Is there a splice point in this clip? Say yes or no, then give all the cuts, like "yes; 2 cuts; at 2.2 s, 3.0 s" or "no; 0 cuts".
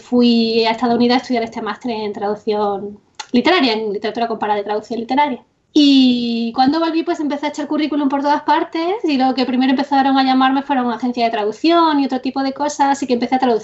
yes; 1 cut; at 5.6 s